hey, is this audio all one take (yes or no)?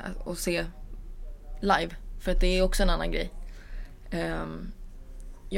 yes